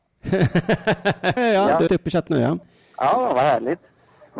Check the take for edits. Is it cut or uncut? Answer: cut